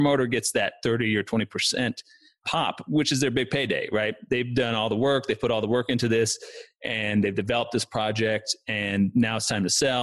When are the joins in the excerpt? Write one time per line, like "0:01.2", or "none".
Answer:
none